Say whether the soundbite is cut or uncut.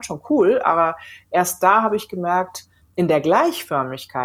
uncut